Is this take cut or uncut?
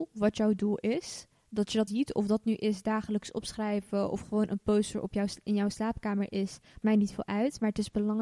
cut